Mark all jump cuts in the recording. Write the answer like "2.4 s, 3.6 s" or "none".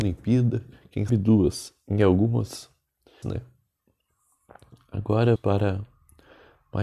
1.1 s, 3.2 s, 5.4 s